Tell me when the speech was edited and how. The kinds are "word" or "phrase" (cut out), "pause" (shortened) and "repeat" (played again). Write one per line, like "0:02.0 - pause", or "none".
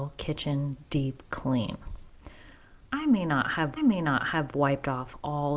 0:03.8 - repeat

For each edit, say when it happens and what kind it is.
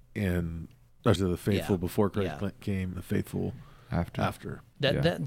0:01.2 - word
0:02.9 - word

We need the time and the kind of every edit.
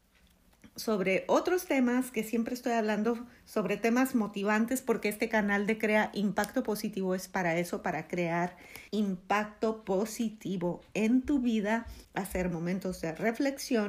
0:08.9 - pause
0:12.0 - pause

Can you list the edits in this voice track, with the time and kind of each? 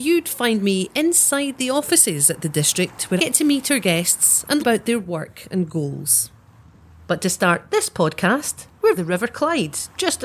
0:03.2 - word
0:04.6 - word
0:09.0 - word

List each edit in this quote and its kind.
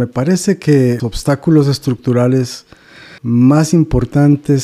0:01.0 - word
0:03.2 - pause

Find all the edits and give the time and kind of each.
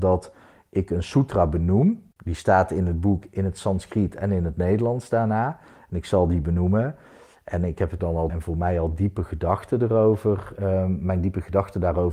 0:02.1 - pause
0:08.0 - word
0:08.3 - word

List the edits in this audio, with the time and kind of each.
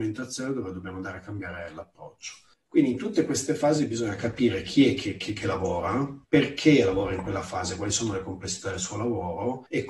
0:06.2 - pause

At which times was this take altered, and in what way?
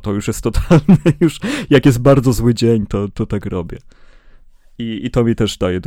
none

